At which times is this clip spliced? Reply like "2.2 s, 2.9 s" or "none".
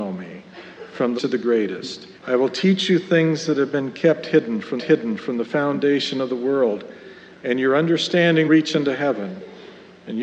1.2 s, 2.2 s, 4.8 s, 8.5 s